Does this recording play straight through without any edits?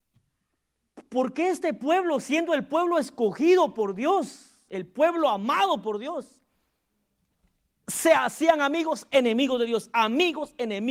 yes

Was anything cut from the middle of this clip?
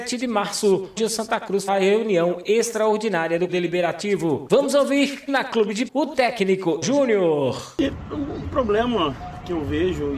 yes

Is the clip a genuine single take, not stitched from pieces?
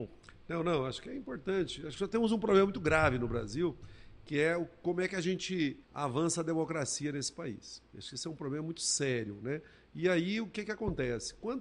no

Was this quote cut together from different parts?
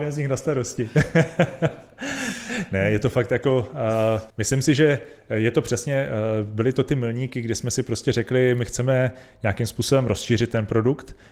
yes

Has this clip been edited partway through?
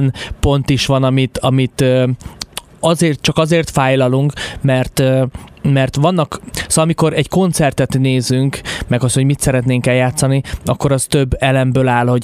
no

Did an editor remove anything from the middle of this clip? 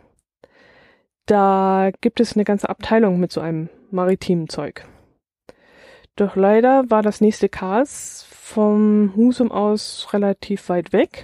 no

